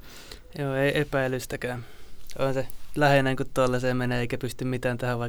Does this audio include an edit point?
no; 0 cuts

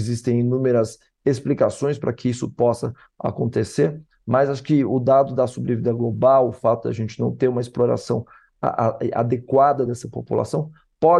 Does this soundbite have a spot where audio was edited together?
no; 0 cuts

